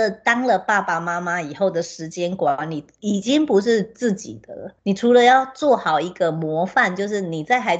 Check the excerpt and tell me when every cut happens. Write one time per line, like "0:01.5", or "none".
0:04.8